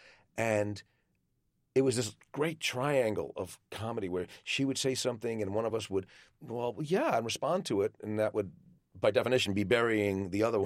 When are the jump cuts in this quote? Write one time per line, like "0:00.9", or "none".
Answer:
none